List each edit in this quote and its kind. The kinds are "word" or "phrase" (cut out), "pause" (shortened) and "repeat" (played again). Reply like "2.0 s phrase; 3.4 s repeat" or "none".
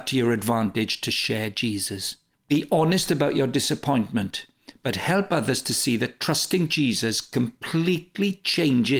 2.3 s pause